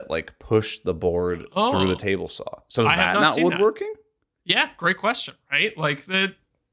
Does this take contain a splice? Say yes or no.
no